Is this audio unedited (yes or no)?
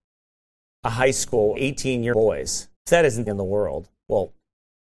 no